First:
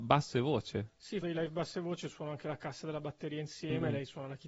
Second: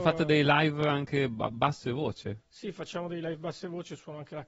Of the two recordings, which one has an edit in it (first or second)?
first